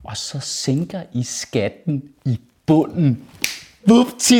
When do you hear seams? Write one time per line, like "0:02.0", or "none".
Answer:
none